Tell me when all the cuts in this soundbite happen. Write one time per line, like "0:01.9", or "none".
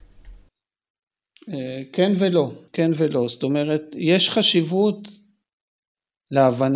0:02.7